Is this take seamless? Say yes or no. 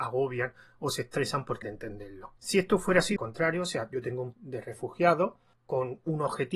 no